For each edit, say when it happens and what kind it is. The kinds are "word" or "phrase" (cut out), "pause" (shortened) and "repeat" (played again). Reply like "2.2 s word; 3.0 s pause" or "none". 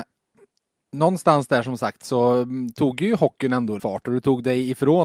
3.8 s word